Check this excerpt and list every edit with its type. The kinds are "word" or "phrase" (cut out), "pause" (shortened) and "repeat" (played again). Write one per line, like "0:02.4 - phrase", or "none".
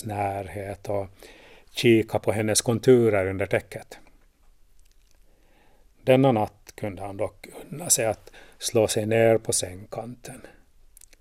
none